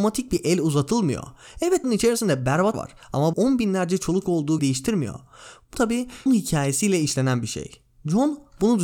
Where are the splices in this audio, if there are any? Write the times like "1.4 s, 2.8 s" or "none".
1.8 s, 2.7 s, 3.3 s, 4.2 s, 4.6 s, 5.7 s, 6.3 s